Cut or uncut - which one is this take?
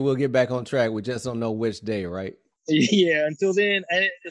uncut